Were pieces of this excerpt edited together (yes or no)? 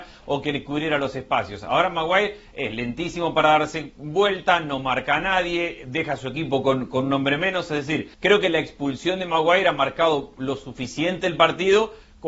yes